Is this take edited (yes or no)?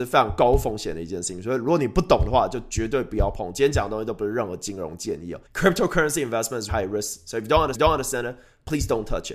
yes